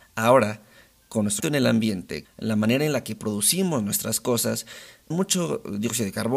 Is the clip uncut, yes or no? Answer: no